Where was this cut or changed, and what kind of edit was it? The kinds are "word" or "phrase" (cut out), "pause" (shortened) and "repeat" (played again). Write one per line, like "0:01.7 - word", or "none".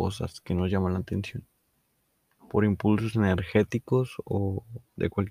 none